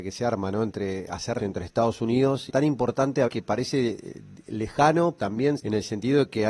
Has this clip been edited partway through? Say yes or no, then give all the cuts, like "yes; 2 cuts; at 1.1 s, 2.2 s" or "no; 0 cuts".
yes; 5 cuts; at 1.4 s, 2.5 s, 3.3 s, 5.2 s, 5.6 s